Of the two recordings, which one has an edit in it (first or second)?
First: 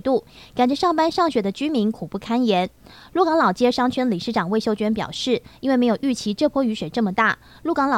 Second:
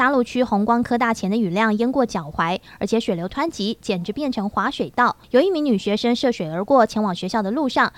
second